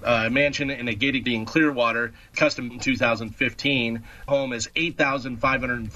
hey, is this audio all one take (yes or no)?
no